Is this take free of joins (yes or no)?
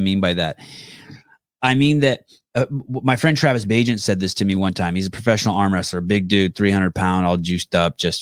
yes